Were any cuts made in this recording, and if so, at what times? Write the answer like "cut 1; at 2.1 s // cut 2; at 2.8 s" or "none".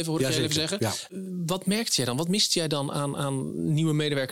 none